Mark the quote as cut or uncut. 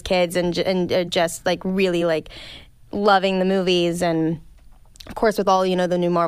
uncut